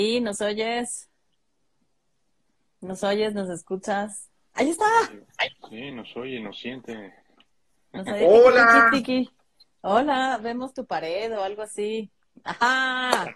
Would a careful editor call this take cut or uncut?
uncut